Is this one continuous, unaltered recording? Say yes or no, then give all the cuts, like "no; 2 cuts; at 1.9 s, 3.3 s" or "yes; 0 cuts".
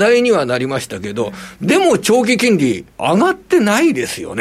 no; 1 cut; at 2.9 s